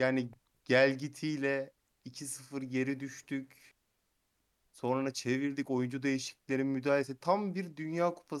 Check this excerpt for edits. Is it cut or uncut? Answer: uncut